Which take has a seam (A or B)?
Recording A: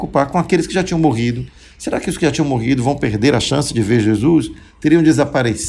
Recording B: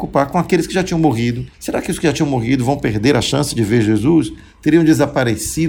B